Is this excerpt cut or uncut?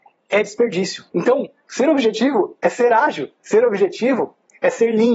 cut